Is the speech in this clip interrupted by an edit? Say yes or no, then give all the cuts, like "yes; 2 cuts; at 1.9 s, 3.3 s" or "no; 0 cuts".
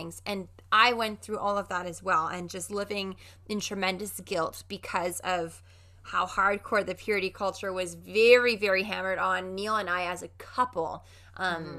no; 0 cuts